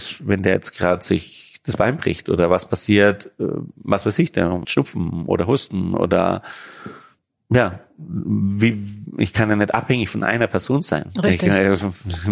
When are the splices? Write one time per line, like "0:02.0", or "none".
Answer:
0:04.6